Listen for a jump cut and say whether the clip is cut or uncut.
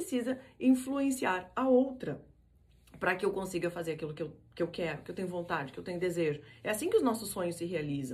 uncut